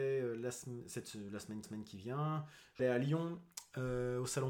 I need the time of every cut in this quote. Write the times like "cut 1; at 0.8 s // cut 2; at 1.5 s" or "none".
cut 1; at 1.6 s // cut 2; at 2.8 s